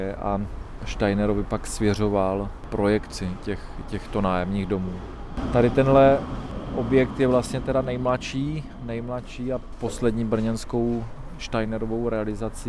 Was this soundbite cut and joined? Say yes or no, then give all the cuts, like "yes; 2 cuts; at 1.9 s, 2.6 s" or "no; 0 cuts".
no; 0 cuts